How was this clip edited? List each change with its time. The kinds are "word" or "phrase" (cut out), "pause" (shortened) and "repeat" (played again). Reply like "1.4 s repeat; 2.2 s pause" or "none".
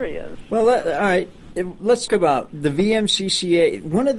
2.1 s word